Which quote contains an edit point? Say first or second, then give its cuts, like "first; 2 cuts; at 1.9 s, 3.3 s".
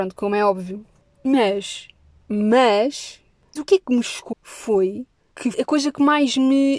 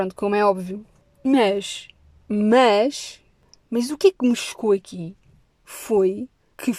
first; 3 cuts; at 3.6 s, 4.3 s, 5.5 s